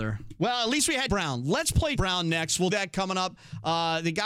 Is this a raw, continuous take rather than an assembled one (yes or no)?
no